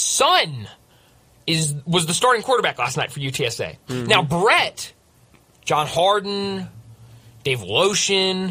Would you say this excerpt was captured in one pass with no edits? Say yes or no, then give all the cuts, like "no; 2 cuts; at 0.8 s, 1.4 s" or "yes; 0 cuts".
yes; 0 cuts